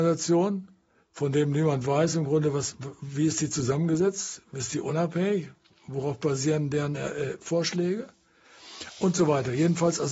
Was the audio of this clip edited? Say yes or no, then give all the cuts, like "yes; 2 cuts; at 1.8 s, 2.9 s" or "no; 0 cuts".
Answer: no; 0 cuts